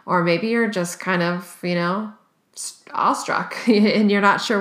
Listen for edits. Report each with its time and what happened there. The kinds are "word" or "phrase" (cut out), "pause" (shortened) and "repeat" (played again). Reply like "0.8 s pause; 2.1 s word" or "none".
none